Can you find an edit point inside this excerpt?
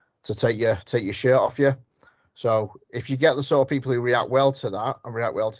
no; 0 cuts

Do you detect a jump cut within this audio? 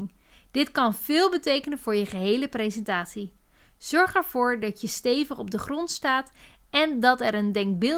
no; 0 cuts

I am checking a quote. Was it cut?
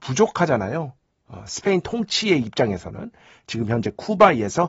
no; 0 cuts

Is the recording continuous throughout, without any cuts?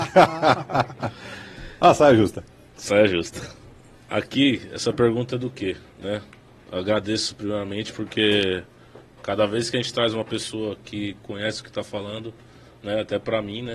yes; 0 cuts

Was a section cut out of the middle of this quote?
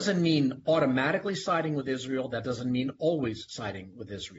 no; 0 cuts

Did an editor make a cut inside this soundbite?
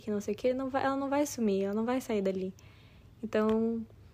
no; 0 cuts

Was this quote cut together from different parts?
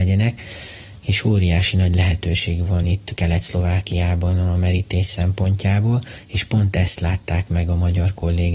no; 0 cuts

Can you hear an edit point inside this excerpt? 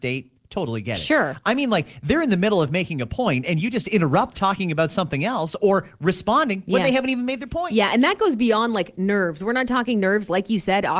yes; 1 cut; at 4.3 s

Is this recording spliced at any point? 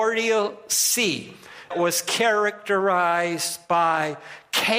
yes; 1 cut; at 1.7 s

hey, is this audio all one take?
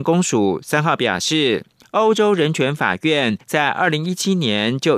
no; 2 cuts; at 1.8 s, 3.4 s

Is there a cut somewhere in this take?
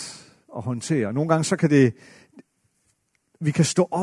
no; 0 cuts

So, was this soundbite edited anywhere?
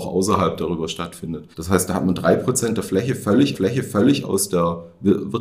yes; 2 cuts; at 1.5 s, 3.5 s

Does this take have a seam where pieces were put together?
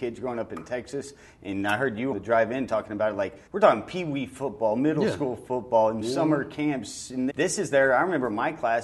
yes; 2 cuts; at 2.1 s, 7.3 s

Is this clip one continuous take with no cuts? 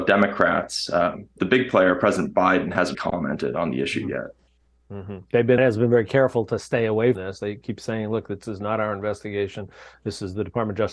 no; 4 cuts; at 1.4 s, 2.9 s, 5.6 s, 7.1 s

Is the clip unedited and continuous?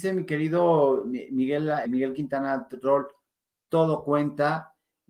no; 1 cut; at 1.9 s

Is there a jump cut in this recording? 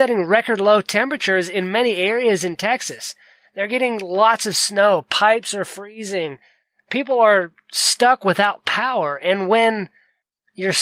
no; 0 cuts

